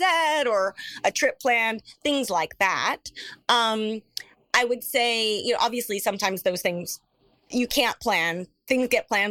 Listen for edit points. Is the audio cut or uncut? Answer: uncut